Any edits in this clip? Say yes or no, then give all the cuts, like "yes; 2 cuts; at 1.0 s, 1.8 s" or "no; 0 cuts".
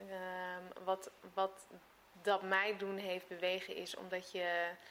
no; 0 cuts